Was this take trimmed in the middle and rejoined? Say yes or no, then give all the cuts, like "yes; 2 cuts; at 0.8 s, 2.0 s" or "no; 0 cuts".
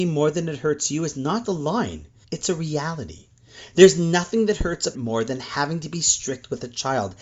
yes; 3 cuts; at 1.4 s, 2.2 s, 4.9 s